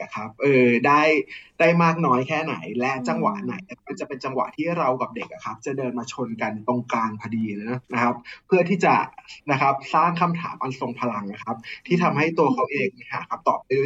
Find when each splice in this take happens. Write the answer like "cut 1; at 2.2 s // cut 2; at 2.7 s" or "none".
cut 1; at 3.8 s // cut 2; at 7.8 s // cut 3; at 9.4 s